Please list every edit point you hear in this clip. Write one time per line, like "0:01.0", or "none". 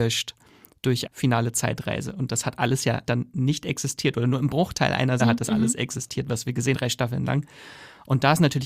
0:01.1
0:03.1
0:05.2
0:06.7